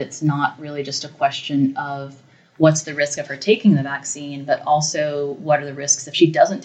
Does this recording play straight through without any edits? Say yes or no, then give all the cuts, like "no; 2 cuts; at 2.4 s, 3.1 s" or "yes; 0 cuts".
yes; 0 cuts